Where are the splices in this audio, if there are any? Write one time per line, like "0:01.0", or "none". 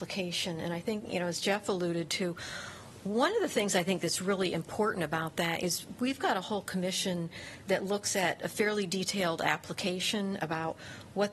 none

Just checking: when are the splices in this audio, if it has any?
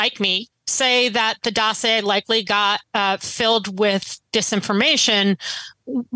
0:02.8

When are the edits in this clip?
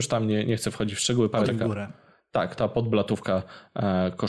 0:01.4
0:02.6

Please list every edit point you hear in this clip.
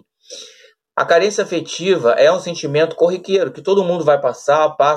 none

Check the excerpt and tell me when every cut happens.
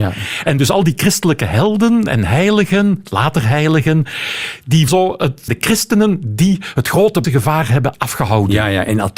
0:04.9
0:05.5
0:07.2
0:07.9

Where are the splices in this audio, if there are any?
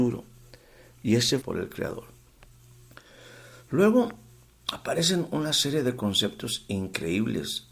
0:01.4

